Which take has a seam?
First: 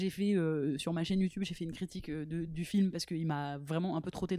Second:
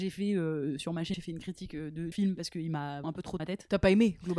second; 4 cuts; at 1.1 s, 2.1 s, 3.0 s, 3.4 s

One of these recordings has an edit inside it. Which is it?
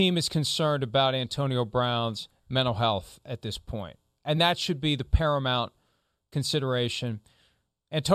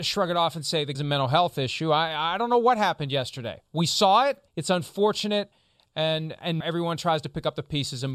second; 3 cuts; at 0.9 s, 4.5 s, 6.6 s

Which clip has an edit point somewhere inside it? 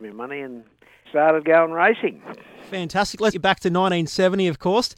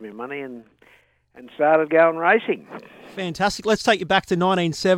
first; 2 cuts; at 1.0 s, 3.3 s

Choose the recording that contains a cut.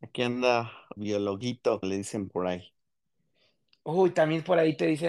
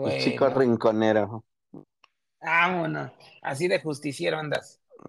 first; 2 cuts; at 1.0 s, 1.8 s

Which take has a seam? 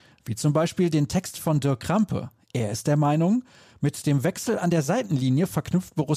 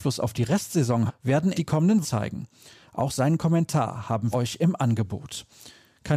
second; 4 cuts; at 1.1 s, 1.5 s, 2.0 s, 4.3 s

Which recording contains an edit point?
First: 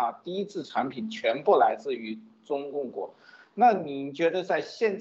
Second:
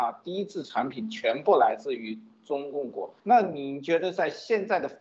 second; 1 cut; at 3.2 s

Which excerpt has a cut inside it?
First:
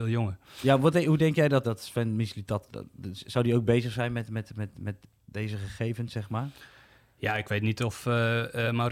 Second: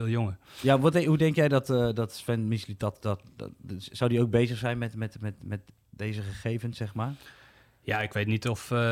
first; 2 cuts; at 1.6 s, 2.7 s

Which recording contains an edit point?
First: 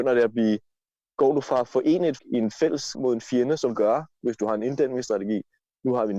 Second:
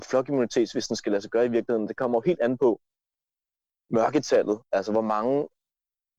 first; 3 cuts; at 2.2 s, 2.9 s, 3.7 s

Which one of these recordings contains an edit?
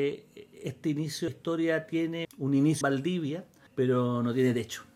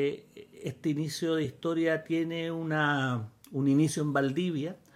first; 3 cuts; at 1.3 s, 2.2 s, 2.8 s

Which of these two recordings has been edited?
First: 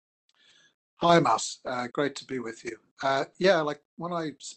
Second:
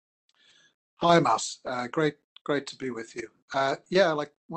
first; 1 cut; at 1.9 s

